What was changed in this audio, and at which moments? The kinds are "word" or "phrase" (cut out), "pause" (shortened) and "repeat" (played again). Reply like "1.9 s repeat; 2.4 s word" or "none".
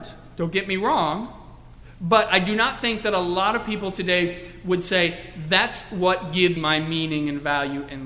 6.6 s word